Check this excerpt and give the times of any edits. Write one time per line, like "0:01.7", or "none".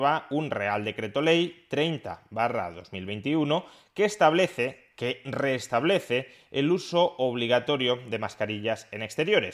none

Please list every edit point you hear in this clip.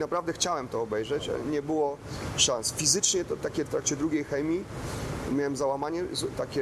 0:03.7

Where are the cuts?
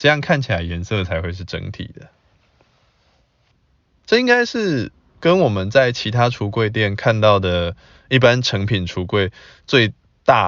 none

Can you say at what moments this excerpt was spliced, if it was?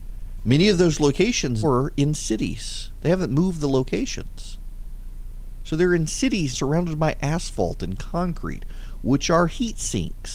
0:01.6
0:06.5

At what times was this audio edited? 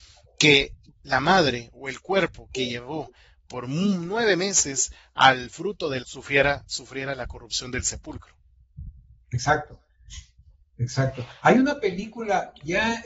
0:06.0

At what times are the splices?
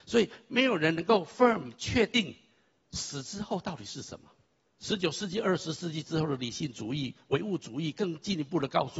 0:04.4

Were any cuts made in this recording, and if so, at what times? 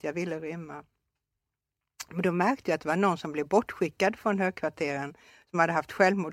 none

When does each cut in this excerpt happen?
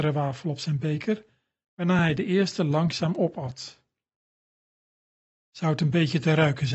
none

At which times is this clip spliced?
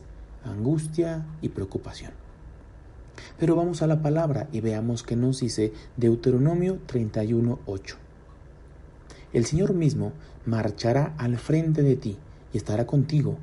none

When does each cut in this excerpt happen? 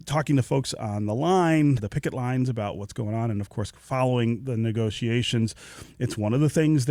0:01.8

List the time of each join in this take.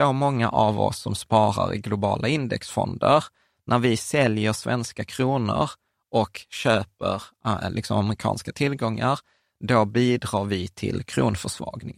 none

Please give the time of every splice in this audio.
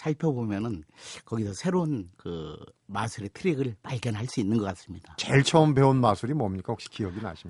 0:02.1

